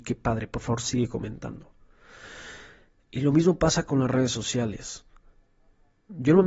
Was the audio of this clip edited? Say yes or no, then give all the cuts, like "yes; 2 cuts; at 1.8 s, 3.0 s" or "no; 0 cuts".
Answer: no; 0 cuts